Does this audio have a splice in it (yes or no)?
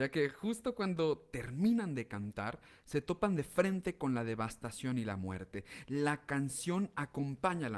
no